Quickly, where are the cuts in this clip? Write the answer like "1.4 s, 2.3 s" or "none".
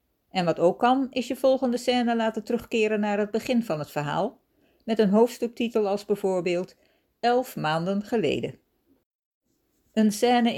none